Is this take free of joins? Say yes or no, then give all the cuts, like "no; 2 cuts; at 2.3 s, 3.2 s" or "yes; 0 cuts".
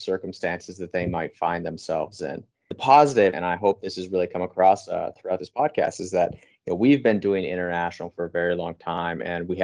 yes; 0 cuts